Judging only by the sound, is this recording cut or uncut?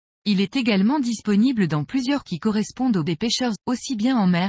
cut